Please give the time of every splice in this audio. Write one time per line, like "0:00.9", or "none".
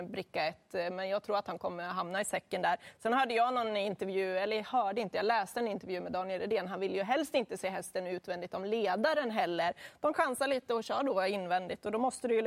0:10.1